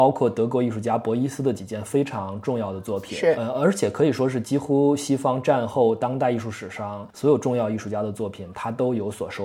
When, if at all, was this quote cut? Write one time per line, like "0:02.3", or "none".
none